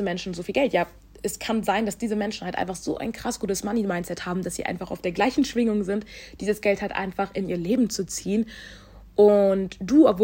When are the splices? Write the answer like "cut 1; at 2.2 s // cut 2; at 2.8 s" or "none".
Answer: none